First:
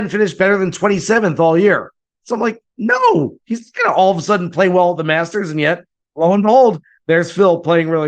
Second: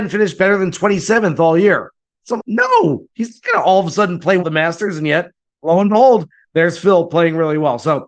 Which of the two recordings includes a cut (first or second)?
second